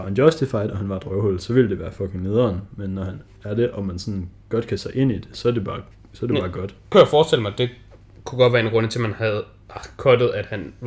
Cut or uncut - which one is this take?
cut